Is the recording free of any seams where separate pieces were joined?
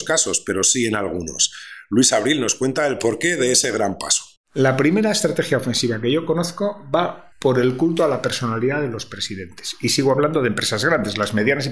no; 1 cut; at 7.3 s

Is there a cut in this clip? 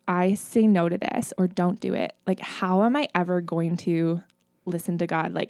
no; 0 cuts

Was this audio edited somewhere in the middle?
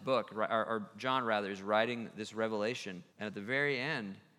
yes; 1 cut; at 3.1 s

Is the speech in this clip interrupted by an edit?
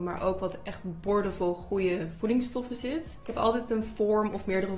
no; 0 cuts

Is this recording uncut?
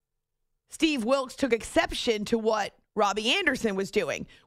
yes; 0 cuts

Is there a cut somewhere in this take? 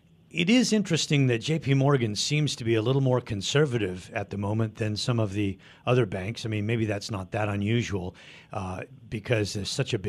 no; 0 cuts

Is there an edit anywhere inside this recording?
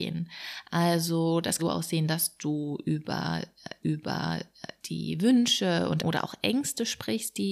yes; 3 cuts; at 1.6 s, 3.8 s, 6.0 s

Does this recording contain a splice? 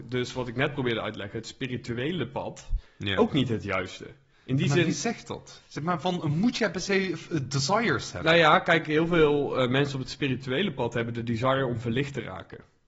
yes; 2 cuts; at 4.3 s, 5.6 s

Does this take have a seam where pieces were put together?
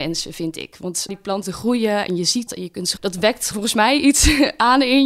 yes; 5 cuts; at 1.1 s, 1.4 s, 2.5 s, 3.0 s, 3.5 s

